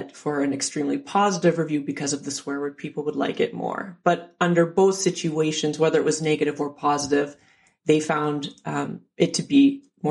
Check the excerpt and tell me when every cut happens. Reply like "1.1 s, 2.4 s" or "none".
none